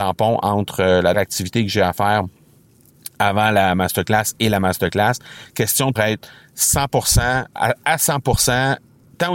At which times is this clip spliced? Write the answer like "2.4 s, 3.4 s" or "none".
1.1 s, 6.0 s, 7.5 s